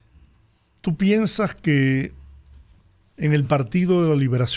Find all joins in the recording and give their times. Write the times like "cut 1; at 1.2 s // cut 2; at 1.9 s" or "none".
none